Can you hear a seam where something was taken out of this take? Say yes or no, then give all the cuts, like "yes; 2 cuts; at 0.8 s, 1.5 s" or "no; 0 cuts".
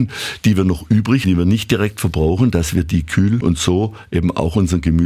yes; 2 cuts; at 1.2 s, 3.4 s